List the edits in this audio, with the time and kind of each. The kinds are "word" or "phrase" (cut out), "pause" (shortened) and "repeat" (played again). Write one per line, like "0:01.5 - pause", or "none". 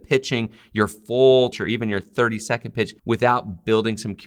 0:01.5 - phrase
0:03.0 - pause